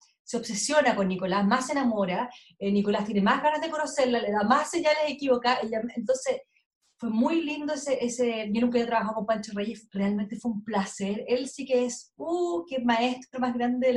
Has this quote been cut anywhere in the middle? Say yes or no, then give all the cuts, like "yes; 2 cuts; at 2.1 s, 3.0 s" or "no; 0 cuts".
no; 0 cuts